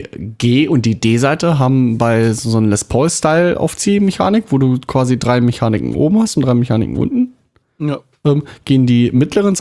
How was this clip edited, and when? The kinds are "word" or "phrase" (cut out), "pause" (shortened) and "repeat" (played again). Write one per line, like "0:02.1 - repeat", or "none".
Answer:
none